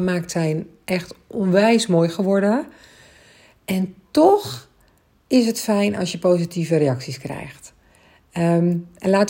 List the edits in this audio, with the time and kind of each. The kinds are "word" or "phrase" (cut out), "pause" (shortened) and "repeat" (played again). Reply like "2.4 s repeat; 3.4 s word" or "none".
none

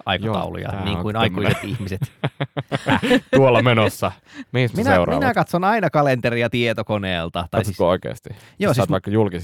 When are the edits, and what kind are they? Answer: 4.7 s phrase

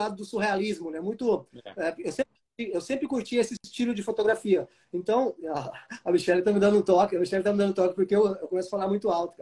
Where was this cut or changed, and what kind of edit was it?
none

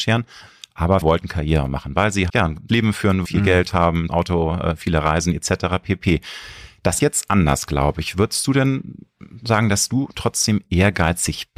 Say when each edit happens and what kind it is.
1.0 s word; 2.3 s word; 2.7 s word; 3.2 s word; 4.1 s word; 7.0 s word

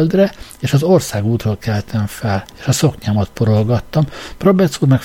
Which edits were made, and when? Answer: 2.5 s pause

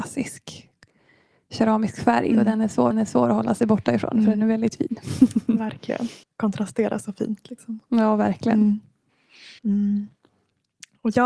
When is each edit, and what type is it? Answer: 2.9 s repeat; 6.2 s pause; 9.6 s pause

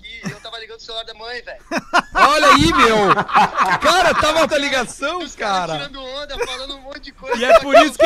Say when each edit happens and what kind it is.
1.1 s word; 4.5 s word

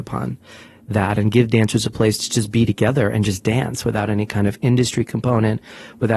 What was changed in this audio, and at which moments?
none

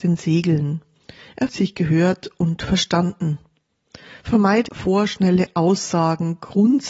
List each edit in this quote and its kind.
1.5 s word; 4.7 s phrase

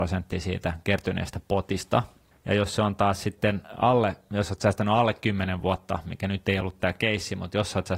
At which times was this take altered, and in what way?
none

